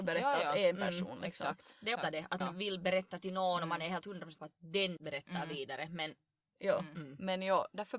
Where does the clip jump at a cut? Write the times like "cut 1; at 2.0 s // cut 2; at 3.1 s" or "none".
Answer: cut 1; at 2.0 s // cut 2; at 2.4 s // cut 3; at 4.4 s // cut 4; at 5.0 s